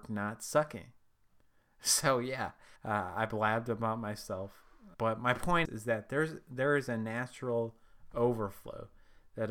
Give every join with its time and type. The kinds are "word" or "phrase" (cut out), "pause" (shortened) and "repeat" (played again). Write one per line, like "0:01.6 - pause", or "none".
0:02.8 - pause
0:04.9 - word
0:05.6 - word